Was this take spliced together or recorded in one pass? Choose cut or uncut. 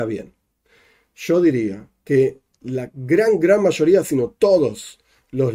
uncut